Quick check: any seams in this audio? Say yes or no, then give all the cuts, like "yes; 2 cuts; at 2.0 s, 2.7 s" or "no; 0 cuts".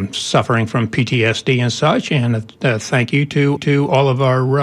yes; 1 cut; at 3.6 s